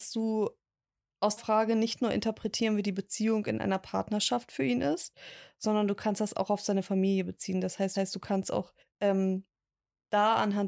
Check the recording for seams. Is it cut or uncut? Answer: cut